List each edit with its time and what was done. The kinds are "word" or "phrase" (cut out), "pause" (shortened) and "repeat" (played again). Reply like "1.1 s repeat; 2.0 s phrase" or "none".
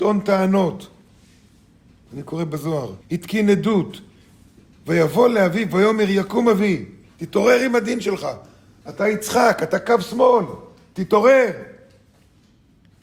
3.0 s pause